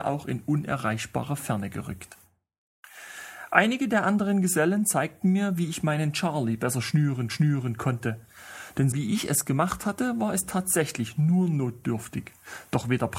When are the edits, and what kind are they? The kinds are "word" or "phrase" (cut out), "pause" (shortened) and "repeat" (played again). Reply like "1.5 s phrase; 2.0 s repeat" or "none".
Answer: 7.3 s repeat; 8.9 s word